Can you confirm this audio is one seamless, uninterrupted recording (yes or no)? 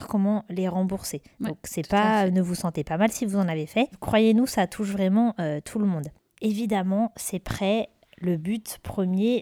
yes